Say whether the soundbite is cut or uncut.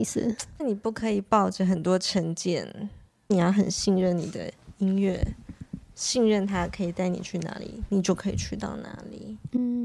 uncut